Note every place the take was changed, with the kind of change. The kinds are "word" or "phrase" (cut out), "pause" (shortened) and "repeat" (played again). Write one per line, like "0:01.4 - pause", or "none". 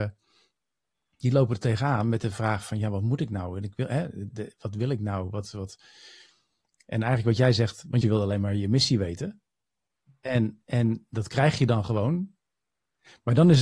0:04.3 - word
0:08.0 - phrase